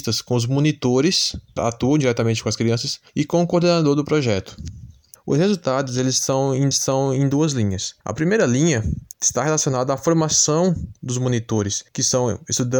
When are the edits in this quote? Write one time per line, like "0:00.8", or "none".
0:01.6
0:03.1
0:05.1
0:06.7
0:08.0
0:09.1
0:11.9

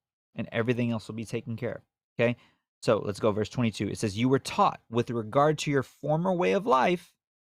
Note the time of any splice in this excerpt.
none

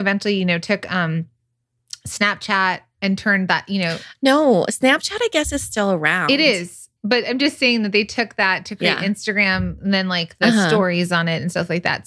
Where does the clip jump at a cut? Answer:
0:07.0

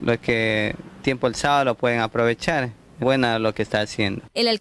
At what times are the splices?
0:01.0
0:03.0

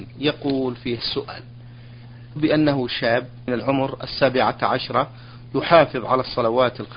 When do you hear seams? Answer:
0:01.0
0:02.4
0:03.5

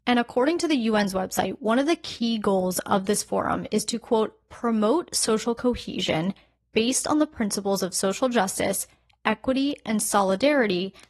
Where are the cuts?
none

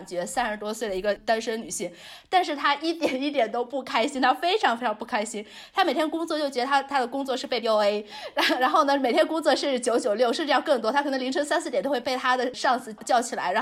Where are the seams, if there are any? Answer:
0:07.6

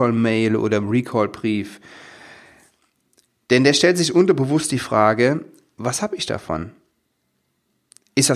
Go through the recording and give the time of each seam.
none

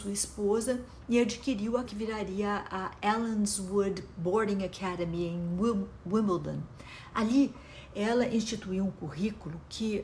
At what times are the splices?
0:01.8

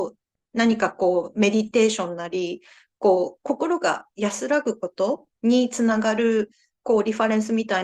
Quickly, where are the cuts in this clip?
0:05.4

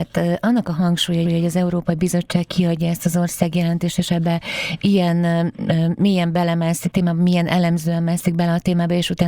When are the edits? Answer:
0:01.2
0:06.9

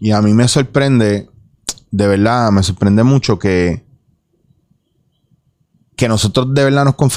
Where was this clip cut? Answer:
none

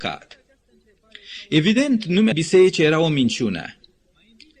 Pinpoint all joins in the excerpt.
0:02.3

